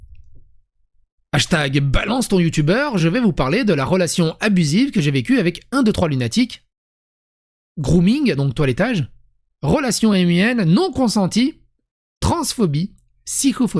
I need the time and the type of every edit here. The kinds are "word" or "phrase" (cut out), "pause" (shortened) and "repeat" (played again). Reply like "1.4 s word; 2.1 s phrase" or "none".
none

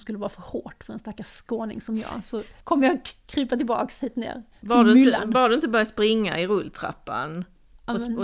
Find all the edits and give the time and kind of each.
2.6 s pause

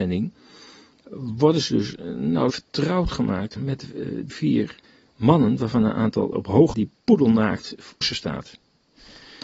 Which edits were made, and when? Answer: 2.5 s word; 3.6 s phrase; 4.3 s word; 4.8 s pause; 6.3 s word; 6.7 s word; 8.0 s word

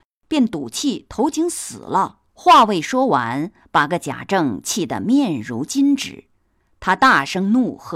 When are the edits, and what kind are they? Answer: 2.3 s pause

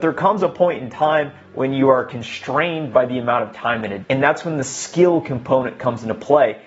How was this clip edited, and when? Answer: 4.0 s word

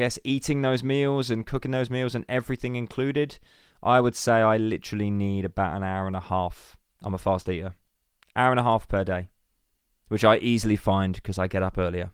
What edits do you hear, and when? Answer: none

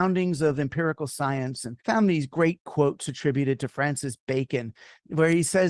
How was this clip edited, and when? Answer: 1.8 s pause

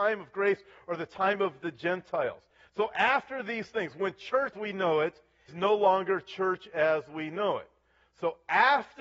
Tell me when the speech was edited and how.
4.5 s word; 5.5 s word

